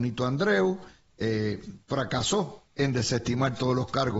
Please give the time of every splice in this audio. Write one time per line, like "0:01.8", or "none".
none